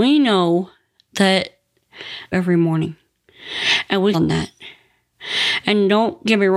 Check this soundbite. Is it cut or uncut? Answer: cut